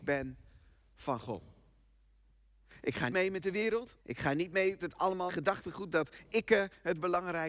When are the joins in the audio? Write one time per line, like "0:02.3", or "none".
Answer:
0:03.1
0:04.0
0:04.8
0:05.3

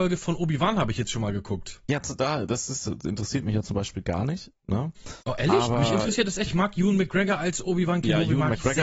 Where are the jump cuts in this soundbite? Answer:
0:05.2
0:06.5

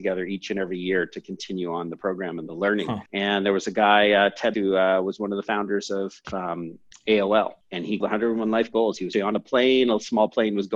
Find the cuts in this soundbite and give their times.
0:03.1
0:04.5
0:06.2
0:07.6
0:08.0
0:09.1

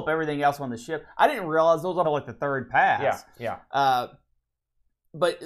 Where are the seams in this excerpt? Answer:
0:02.0

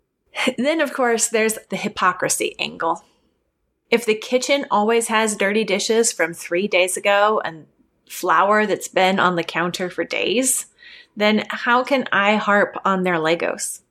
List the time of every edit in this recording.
0:01.7

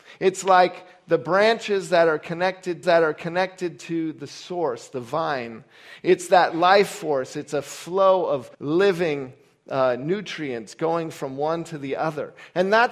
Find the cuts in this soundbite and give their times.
0:02.8
0:08.5

